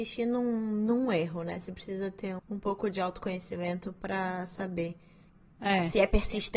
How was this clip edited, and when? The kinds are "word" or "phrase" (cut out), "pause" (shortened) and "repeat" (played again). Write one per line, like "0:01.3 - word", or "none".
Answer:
0:02.4 - word
0:05.3 - pause